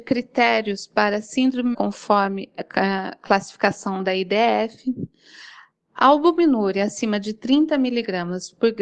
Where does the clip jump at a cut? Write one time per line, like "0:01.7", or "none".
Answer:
0:01.7